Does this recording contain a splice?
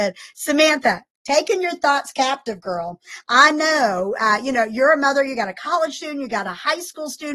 no; 0 cuts

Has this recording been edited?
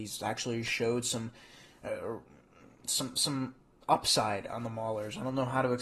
no; 0 cuts

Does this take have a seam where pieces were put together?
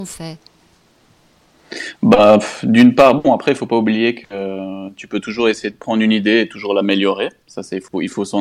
no; 0 cuts

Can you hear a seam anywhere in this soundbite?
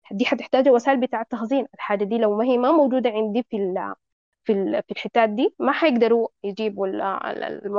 no; 0 cuts

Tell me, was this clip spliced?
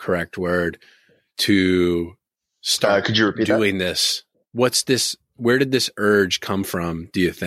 yes; 2 cuts; at 2.4 s, 4.3 s

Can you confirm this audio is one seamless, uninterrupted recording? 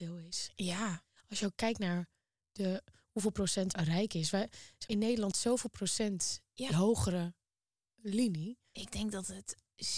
no; 4 cuts; at 3.7 s, 4.9 s, 5.3 s, 6.7 s

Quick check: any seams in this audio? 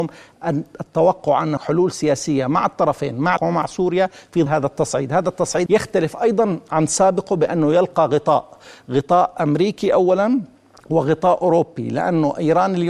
yes; 4 cuts; at 1.6 s, 3.4 s, 4.5 s, 5.7 s

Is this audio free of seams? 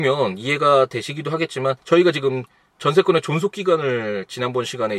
no; 1 cut; at 1.8 s

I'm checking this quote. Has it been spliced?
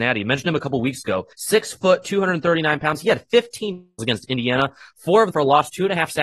yes; 3 cuts; at 1.3 s, 4.0 s, 5.3 s

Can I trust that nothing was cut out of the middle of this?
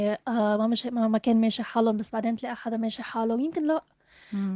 yes; 0 cuts

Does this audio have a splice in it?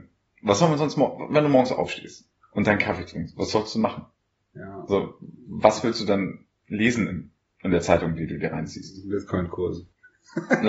no; 0 cuts

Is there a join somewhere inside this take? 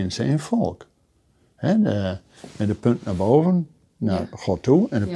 no; 0 cuts

